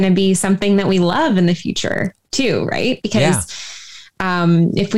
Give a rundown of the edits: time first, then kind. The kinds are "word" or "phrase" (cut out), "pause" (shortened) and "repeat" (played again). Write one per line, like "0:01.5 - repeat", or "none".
none